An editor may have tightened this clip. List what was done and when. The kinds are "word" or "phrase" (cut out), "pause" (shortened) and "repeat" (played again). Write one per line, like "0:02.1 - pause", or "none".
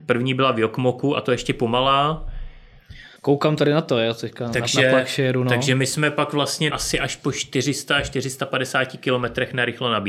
0:03.2 - pause
0:06.7 - word